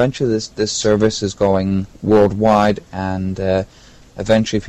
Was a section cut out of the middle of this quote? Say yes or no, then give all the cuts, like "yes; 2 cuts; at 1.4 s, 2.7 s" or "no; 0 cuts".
yes; 1 cut; at 1.9 s